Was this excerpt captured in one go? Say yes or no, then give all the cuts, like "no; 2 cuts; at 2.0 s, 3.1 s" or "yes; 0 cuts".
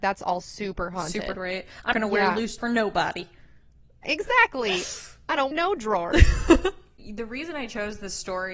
no; 5 cuts; at 1.3 s, 1.9 s, 2.6 s, 4.0 s, 5.5 s